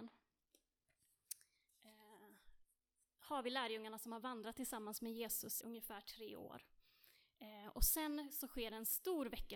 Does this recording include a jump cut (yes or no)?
yes